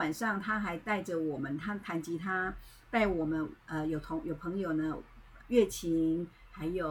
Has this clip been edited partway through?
yes; 2 cuts; at 3.6 s, 5.4 s

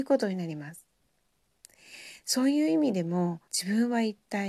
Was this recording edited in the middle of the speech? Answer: yes; 1 cut; at 3.5 s

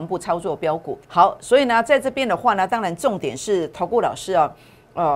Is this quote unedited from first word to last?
no; 1 cut; at 1.0 s

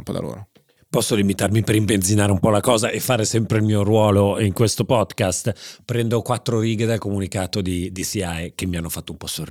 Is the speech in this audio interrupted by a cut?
no; 0 cuts

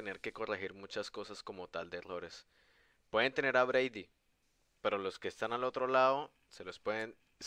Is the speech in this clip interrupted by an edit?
no; 0 cuts

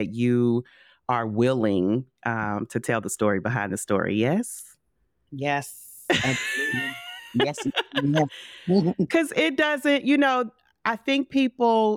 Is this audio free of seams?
yes; 0 cuts

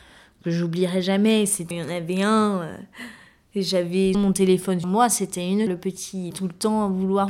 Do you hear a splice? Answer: yes; 5 cuts; at 1.7 s, 4.1 s, 4.8 s, 5.7 s, 6.3 s

